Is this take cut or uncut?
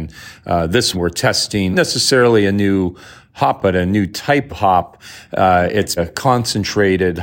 cut